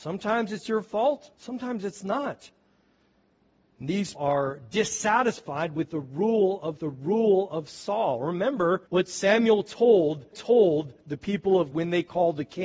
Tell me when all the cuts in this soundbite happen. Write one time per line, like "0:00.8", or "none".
0:01.3
0:04.1
0:06.8
0:08.9
0:10.3
0:11.7